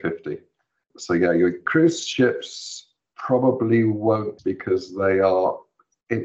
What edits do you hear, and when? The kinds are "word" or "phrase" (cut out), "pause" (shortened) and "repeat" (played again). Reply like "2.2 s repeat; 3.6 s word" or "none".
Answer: 4.4 s word